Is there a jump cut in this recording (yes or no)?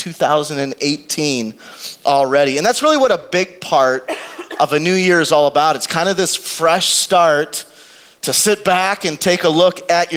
no